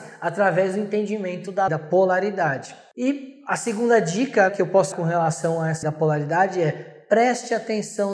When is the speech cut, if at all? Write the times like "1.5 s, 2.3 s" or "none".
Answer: 1.7 s, 4.5 s, 4.9 s, 5.8 s